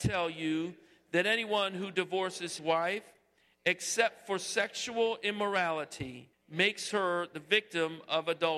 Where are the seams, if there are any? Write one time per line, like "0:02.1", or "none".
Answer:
0:02.6
0:06.3